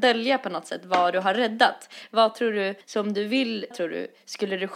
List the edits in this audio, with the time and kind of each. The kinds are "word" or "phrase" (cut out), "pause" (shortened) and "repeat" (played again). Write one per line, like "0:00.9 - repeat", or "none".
0:02.8 - pause
0:03.7 - word

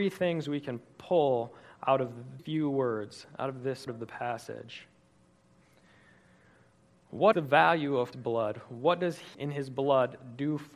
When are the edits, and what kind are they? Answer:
0:02.4 - word
0:03.9 - word
0:07.3 - word
0:08.1 - word
0:09.3 - word

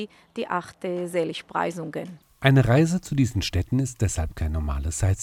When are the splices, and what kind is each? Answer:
none

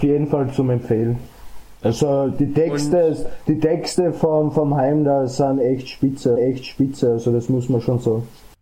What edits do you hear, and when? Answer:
0:06.4 - repeat

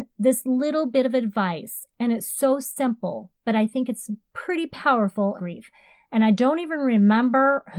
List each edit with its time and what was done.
0:05.4 - phrase

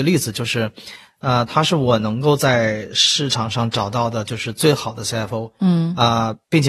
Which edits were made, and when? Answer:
none

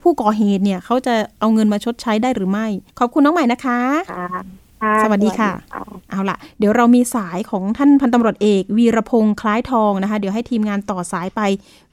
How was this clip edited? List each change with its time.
0:02.9 - pause
0:06.0 - pause

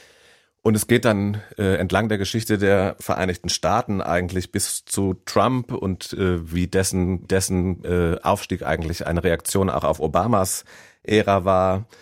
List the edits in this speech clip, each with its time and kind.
0:07.2 - repeat

